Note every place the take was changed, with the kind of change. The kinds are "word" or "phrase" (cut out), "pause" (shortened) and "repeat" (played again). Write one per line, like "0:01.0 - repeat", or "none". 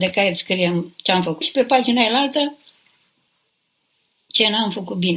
0:01.4 - word